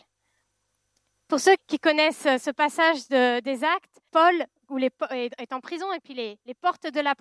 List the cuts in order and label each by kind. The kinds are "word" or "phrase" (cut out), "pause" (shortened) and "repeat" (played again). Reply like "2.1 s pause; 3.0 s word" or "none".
1.6 s word; 4.1 s pause